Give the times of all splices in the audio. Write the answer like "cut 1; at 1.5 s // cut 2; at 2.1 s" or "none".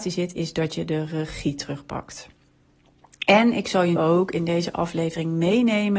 cut 1; at 4.0 s